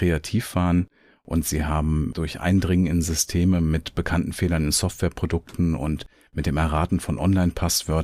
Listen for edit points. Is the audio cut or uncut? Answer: uncut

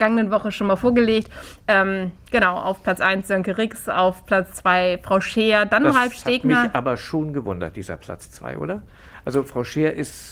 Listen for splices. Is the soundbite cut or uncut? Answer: uncut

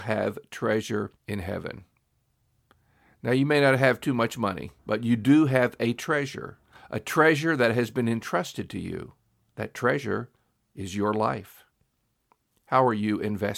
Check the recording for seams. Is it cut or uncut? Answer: cut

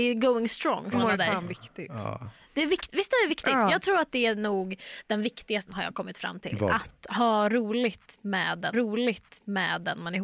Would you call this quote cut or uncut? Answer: cut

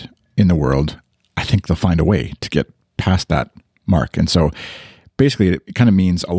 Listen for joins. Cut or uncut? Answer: uncut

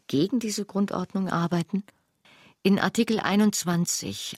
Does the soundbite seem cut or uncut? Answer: cut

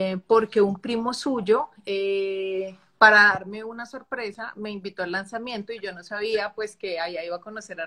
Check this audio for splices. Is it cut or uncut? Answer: uncut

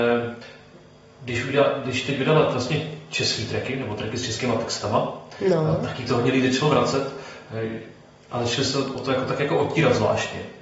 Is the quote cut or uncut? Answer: uncut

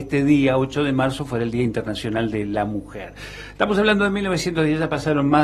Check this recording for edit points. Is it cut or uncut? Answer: uncut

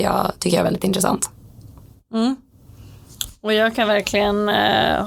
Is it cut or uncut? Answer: uncut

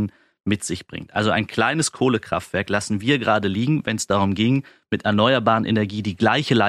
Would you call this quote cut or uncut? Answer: uncut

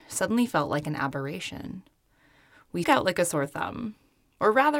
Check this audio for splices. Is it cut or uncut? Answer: cut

